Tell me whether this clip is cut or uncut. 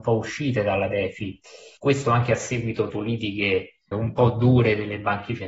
cut